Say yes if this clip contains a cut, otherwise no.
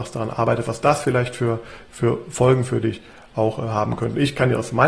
no